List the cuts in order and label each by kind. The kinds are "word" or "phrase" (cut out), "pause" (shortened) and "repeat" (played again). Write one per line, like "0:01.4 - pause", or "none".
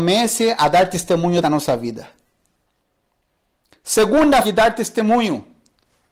0:01.4 - word
0:04.4 - word